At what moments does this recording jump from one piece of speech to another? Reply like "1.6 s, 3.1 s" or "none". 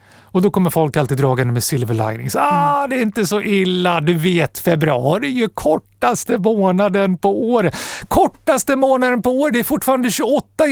none